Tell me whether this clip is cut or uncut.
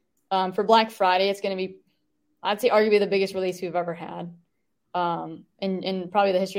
uncut